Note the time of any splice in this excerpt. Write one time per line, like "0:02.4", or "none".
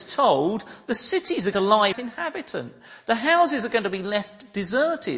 0:01.5
0:01.9